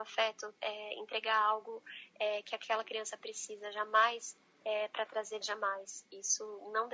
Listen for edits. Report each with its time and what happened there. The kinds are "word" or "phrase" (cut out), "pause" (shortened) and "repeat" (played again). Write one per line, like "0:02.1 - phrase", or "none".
0:05.4 - word